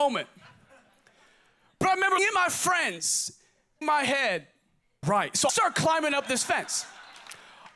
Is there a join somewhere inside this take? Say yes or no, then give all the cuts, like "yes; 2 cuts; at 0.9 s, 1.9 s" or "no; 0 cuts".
yes; 4 cuts; at 2.2 s, 3.8 s, 5.0 s, 5.5 s